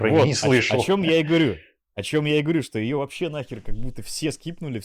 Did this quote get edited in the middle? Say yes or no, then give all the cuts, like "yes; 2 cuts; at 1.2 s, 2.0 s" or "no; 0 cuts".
no; 0 cuts